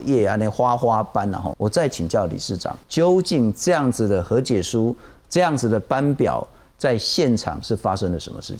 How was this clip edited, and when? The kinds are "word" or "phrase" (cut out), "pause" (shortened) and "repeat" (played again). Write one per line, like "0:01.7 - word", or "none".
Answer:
0:01.5 - word
0:02.8 - pause